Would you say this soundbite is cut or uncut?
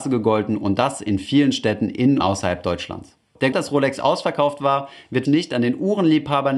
cut